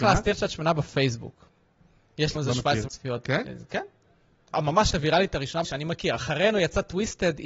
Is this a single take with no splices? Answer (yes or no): no